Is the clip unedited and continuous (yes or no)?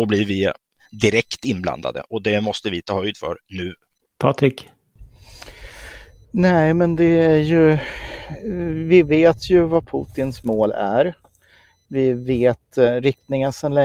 yes